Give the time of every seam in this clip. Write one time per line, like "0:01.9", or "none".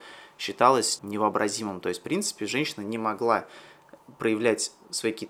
0:01.0